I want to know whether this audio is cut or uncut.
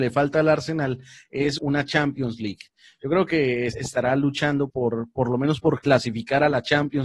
cut